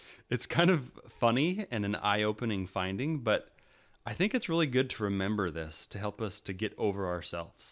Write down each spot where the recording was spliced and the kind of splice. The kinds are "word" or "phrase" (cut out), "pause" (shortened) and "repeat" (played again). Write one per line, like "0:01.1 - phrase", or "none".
none